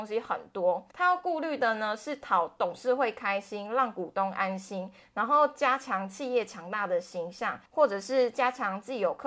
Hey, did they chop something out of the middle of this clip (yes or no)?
yes